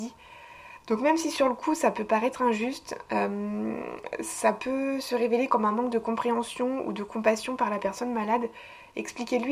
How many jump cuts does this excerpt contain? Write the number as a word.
zero